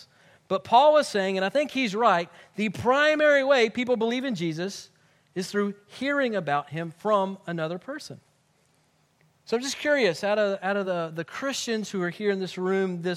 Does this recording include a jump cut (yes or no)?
no